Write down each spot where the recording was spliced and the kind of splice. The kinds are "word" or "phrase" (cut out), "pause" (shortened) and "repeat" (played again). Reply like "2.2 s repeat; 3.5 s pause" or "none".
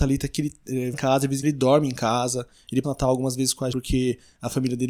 0.9 s word; 1.4 s word; 2.8 s word; 3.7 s word

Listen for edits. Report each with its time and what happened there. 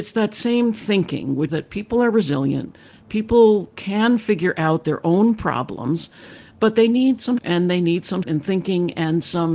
1.5 s word; 7.4 s word; 8.2 s word

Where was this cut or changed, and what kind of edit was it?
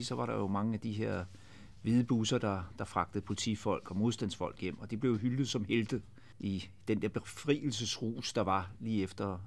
none

